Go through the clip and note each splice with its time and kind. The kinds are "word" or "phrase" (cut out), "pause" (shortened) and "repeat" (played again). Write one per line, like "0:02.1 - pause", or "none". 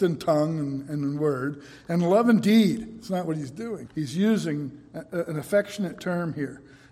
0:03.9 - word